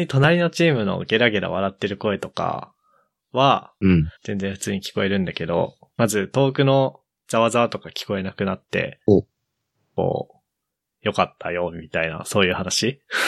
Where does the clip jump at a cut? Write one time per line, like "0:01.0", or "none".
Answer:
0:04.2